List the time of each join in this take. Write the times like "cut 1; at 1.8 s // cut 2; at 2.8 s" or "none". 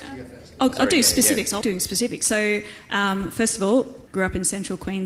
cut 1; at 1.6 s // cut 2; at 4.1 s